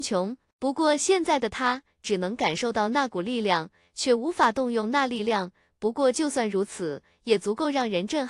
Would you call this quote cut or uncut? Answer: uncut